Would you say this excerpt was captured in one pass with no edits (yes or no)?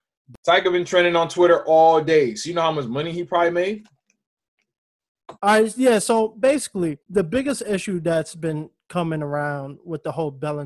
no